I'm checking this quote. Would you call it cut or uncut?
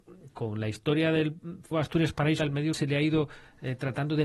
cut